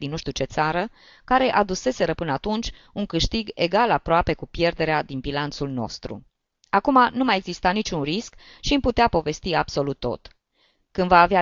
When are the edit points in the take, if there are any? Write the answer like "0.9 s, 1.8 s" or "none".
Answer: none